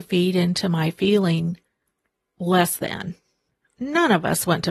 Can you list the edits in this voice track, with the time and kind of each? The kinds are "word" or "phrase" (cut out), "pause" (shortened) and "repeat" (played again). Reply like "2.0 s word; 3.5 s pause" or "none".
none

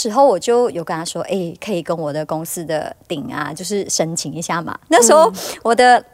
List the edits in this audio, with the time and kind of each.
none

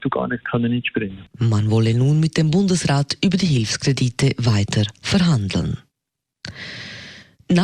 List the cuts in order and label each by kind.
1.3 s pause

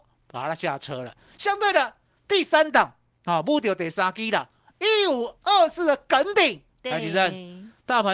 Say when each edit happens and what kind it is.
none

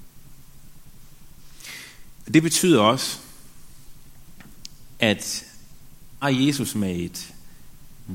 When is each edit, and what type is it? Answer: 6.2 s word

